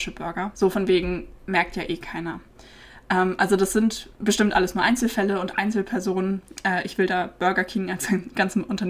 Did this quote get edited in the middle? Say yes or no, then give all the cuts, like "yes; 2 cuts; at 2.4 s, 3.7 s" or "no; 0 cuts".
no; 0 cuts